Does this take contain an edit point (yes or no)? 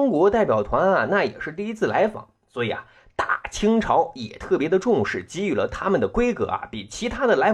no